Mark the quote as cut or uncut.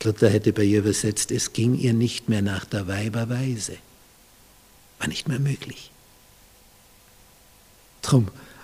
uncut